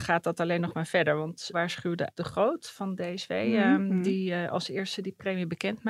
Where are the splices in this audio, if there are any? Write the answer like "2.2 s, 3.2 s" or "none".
1.5 s, 2.1 s